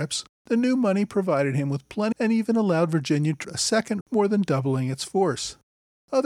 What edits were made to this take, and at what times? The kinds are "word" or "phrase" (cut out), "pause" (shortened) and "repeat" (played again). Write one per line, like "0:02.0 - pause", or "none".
0:02.1 - phrase
0:03.4 - word
0:04.0 - word